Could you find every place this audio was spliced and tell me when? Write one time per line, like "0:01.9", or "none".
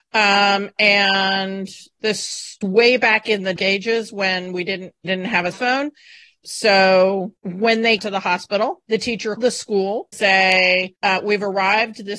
0:02.6
0:03.6
0:05.0
0:05.5
0:06.4
0:08.0
0:09.4
0:10.1